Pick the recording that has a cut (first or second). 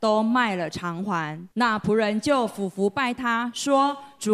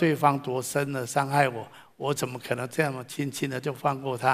first